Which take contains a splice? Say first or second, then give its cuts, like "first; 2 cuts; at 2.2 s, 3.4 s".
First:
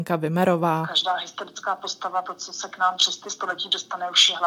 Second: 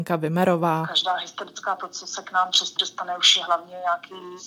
second; 2 cuts; at 1.8 s, 2.8 s